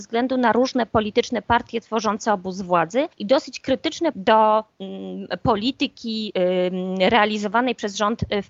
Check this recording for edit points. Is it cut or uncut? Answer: cut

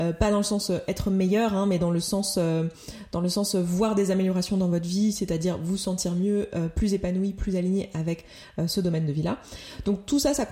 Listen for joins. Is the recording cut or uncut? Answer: uncut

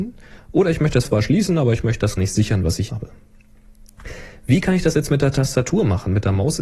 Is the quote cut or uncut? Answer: cut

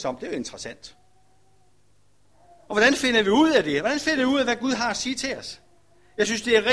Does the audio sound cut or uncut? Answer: uncut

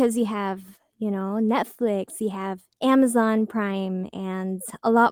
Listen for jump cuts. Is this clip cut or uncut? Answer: cut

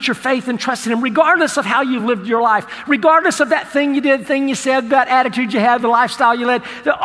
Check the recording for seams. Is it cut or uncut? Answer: uncut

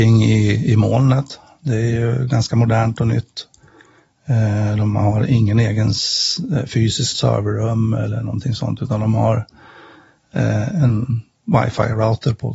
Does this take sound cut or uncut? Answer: cut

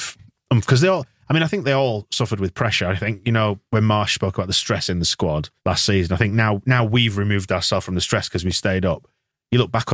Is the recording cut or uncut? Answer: cut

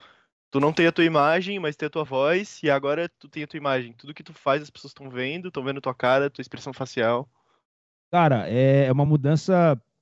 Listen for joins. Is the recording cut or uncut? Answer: uncut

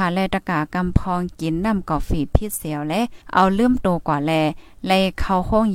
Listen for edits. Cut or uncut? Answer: cut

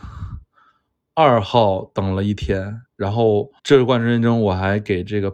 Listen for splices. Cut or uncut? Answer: cut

